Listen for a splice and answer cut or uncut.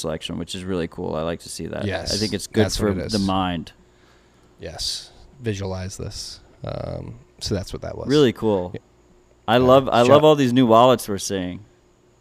uncut